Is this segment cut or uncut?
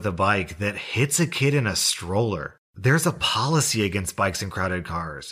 uncut